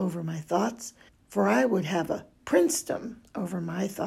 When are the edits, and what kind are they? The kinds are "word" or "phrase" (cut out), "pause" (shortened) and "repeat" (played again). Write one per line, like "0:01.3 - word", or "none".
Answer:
0:01.1 - pause